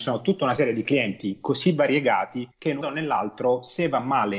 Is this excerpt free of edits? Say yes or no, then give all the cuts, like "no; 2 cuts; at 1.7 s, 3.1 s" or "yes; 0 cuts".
no; 2 cuts; at 2.5 s, 2.8 s